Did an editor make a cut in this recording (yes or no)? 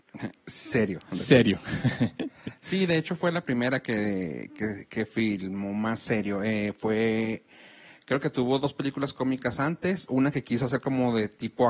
no